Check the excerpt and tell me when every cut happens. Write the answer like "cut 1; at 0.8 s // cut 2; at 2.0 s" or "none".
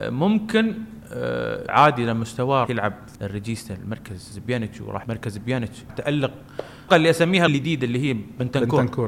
cut 1; at 1.7 s // cut 2; at 2.7 s // cut 3; at 3.2 s // cut 4; at 4.3 s // cut 5; at 5.0 s // cut 6; at 5.9 s // cut 7; at 6.9 s // cut 8; at 7.5 s